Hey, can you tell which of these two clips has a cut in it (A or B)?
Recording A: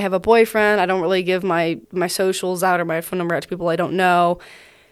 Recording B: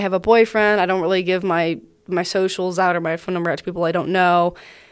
A